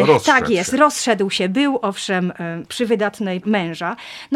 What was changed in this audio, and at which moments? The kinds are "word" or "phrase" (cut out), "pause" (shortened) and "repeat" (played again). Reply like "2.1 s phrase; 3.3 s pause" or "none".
3.4 s word

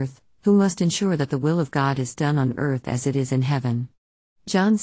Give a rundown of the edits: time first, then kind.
none

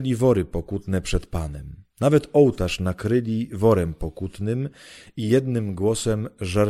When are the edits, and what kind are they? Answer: 1.9 s pause

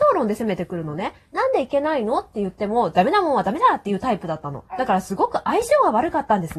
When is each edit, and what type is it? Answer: 4.7 s pause

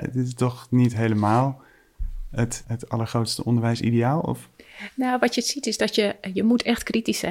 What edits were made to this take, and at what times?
2.6 s word

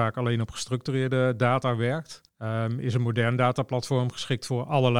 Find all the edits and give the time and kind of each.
2.3 s pause

